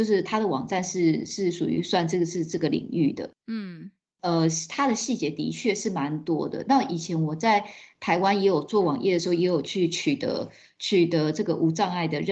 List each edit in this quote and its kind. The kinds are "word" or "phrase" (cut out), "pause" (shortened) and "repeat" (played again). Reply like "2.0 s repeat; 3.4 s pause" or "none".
none